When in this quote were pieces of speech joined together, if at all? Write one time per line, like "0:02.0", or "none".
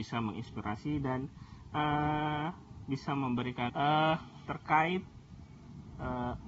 0:03.7